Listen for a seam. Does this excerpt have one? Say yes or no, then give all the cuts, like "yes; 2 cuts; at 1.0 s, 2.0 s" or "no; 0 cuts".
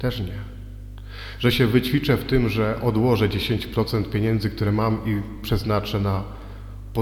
no; 0 cuts